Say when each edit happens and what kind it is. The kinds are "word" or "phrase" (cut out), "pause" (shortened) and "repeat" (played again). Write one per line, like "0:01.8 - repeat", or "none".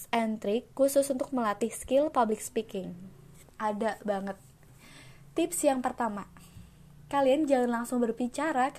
0:03.5 - pause